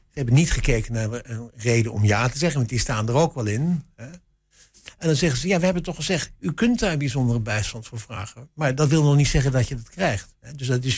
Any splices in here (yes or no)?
no